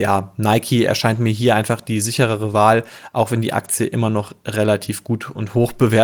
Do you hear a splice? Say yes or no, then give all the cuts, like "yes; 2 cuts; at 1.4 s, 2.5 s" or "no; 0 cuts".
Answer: no; 0 cuts